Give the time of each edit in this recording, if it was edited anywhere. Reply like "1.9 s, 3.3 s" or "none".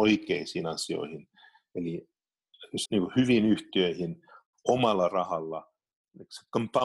2.9 s